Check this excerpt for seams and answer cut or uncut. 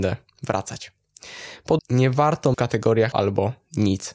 cut